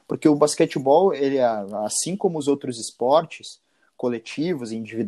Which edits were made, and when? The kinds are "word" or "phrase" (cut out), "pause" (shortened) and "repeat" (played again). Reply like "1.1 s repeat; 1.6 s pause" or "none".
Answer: none